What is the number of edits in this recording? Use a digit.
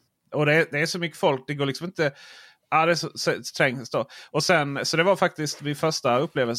0